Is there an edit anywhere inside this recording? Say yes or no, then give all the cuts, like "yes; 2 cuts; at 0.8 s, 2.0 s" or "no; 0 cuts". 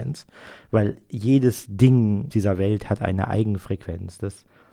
yes; 1 cut; at 2.3 s